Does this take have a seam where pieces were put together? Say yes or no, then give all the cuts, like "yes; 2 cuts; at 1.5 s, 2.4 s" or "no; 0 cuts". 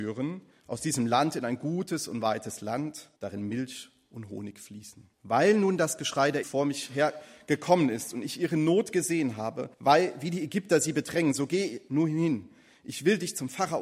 yes; 4 cuts; at 3.2 s, 5.1 s, 6.4 s, 9.7 s